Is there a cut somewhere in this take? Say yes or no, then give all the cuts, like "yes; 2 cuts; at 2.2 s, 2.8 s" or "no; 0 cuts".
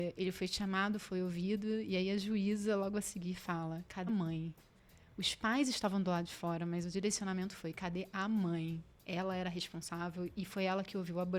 yes; 1 cut; at 4.1 s